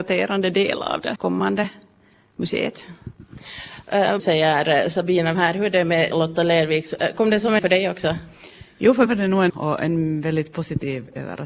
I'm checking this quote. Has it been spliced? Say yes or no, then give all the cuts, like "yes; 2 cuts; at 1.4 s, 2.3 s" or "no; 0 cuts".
yes; 7 cuts; at 1.1 s, 4.2 s, 5.3 s, 6.1 s, 7.6 s, 9.1 s, 9.5 s